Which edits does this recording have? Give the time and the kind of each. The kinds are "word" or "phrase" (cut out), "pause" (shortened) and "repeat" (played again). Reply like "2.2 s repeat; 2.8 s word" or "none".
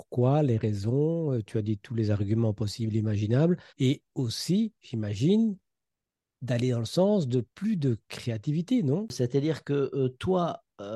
3.7 s pause; 4.8 s pause; 7.5 s pause